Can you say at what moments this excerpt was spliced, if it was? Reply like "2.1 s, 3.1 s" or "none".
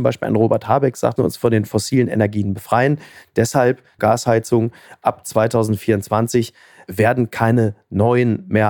1.2 s, 4.0 s